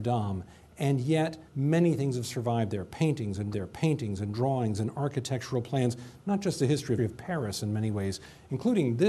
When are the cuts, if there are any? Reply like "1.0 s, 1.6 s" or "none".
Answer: 1.5 s, 3.5 s, 7.0 s